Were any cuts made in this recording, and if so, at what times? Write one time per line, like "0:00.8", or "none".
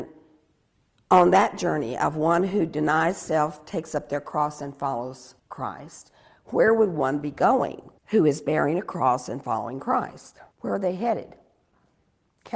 0:05.4
0:08.0
0:10.5